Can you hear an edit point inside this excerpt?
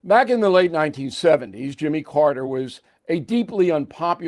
no; 0 cuts

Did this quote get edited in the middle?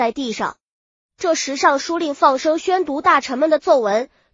no; 0 cuts

